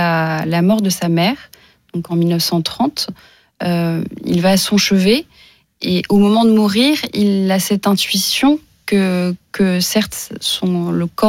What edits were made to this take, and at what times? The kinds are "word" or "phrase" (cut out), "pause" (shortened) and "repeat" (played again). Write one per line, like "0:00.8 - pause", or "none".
none